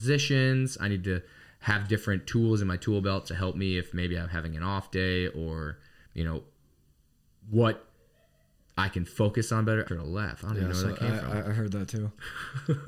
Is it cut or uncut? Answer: cut